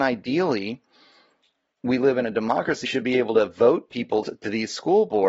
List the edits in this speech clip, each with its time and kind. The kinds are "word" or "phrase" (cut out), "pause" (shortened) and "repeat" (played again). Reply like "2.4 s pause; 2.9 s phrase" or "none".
2.8 s word; 4.2 s word